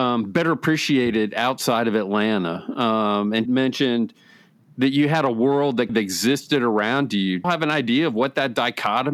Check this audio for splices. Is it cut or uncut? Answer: cut